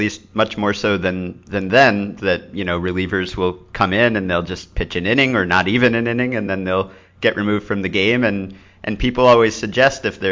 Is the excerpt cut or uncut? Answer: uncut